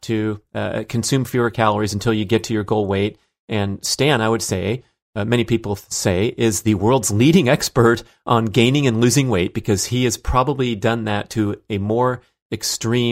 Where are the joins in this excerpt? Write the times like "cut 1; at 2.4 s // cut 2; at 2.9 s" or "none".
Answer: none